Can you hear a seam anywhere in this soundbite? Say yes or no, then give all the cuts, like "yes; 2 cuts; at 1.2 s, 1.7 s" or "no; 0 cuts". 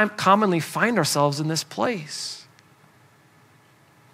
no; 0 cuts